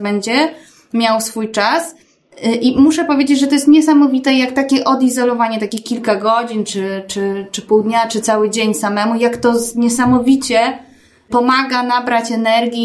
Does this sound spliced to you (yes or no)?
no